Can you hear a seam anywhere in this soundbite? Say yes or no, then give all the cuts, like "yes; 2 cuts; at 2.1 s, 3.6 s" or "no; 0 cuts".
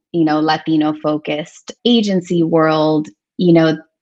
yes; 1 cut; at 1.8 s